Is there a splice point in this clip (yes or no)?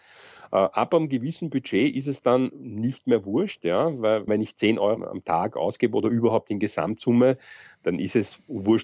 yes